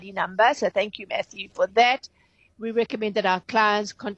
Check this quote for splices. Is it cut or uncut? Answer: uncut